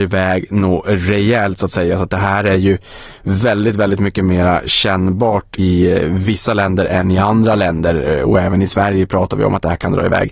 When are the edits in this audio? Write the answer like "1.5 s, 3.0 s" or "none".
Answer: 5.6 s